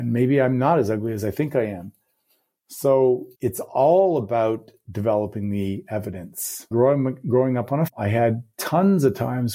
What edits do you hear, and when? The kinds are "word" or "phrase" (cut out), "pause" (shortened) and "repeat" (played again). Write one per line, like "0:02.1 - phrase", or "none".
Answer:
0:03.3 - pause
0:06.7 - word
0:07.9 - word